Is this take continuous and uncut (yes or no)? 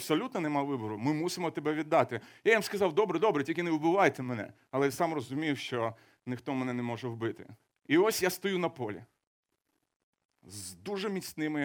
yes